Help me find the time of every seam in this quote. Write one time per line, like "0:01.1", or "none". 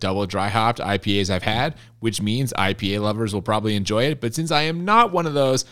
none